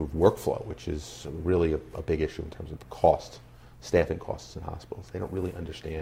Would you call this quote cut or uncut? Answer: uncut